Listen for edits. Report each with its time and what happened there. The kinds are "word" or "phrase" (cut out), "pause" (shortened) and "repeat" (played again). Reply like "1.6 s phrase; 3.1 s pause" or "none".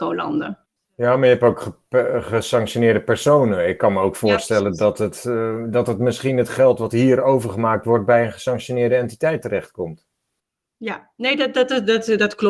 none

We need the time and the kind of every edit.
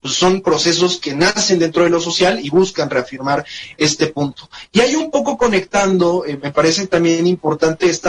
none

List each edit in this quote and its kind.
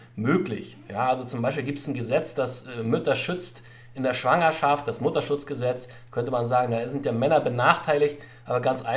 none

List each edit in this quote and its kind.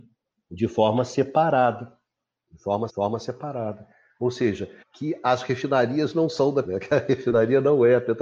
2.9 s repeat; 4.8 s pause; 6.6 s word

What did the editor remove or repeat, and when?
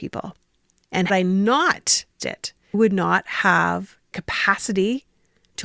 1.1 s word; 2.2 s word; 2.7 s word; 4.1 s word

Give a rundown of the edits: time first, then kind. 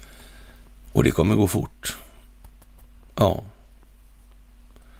none

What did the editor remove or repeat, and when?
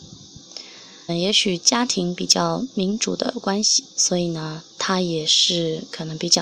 1.1 s word; 3.9 s pause; 4.7 s pause

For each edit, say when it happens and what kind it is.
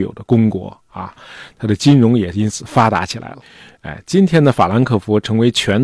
none

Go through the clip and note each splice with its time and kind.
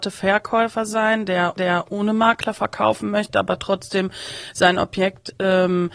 1.6 s repeat

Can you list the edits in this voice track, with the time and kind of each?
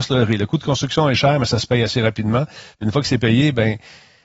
none

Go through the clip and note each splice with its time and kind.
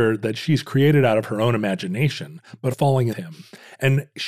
2.7 s word; 3.1 s phrase

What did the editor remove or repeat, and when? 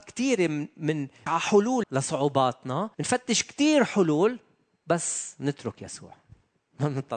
1.3 s word; 1.8 s word; 2.9 s pause

